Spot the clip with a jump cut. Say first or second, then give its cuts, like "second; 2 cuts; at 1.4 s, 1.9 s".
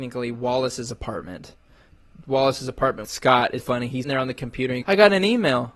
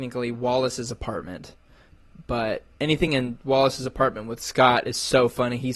first; 5 cuts; at 2.2 s, 3.0 s, 3.6 s, 4.0 s, 4.8 s